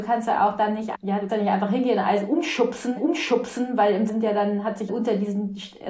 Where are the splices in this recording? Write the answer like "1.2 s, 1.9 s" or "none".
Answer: 0.9 s, 1.3 s, 3.0 s, 4.1 s, 4.9 s

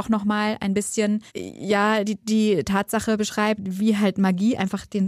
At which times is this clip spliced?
1.3 s

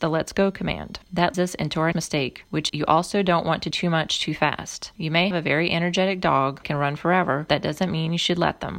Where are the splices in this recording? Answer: 1.3 s, 1.9 s, 2.7 s, 3.7 s, 5.3 s, 6.6 s, 7.5 s

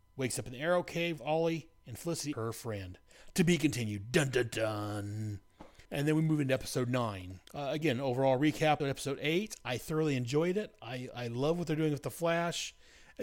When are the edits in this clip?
1.2 s, 2.3 s, 5.8 s, 7.4 s, 8.8 s

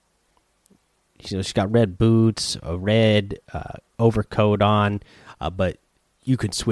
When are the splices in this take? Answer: 3.9 s

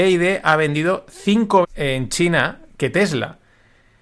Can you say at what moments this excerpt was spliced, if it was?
1.6 s

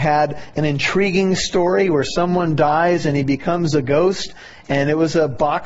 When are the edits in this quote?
none

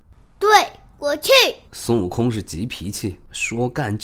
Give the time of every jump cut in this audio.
1.7 s

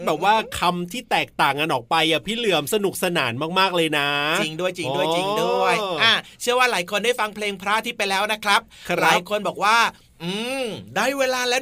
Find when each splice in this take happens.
none

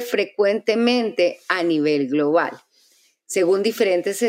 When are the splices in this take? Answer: none

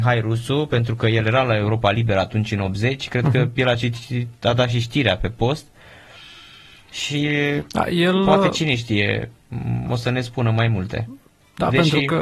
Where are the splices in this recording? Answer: none

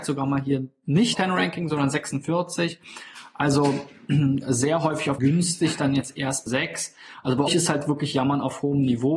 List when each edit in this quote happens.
1.1 s, 5.2 s, 6.5 s, 7.5 s

